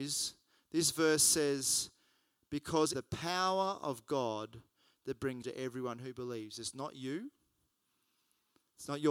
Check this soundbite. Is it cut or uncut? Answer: cut